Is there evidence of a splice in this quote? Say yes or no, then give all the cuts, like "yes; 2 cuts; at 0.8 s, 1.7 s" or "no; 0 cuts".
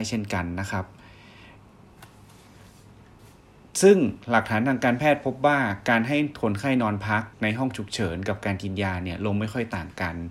yes; 1 cut; at 7.3 s